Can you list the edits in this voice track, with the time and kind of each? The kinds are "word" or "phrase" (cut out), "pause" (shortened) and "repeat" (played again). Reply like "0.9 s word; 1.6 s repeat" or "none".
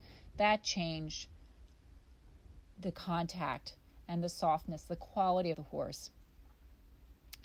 5.5 s phrase